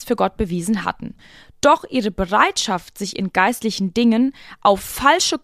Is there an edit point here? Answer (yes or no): no